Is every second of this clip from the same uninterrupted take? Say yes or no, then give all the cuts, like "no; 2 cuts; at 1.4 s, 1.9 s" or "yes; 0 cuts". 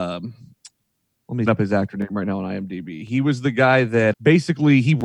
no; 2 cuts; at 1.5 s, 4.1 s